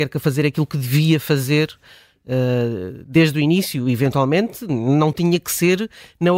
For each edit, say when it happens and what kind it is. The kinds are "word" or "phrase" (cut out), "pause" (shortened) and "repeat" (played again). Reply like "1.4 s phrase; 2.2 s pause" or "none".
none